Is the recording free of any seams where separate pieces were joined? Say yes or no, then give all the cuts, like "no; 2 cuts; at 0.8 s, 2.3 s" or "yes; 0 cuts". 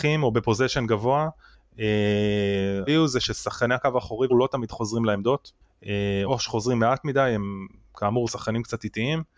no; 3 cuts; at 2.9 s, 4.3 s, 6.3 s